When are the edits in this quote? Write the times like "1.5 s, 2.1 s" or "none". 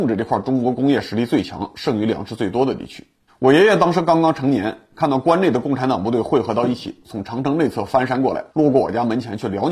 3.3 s, 8.5 s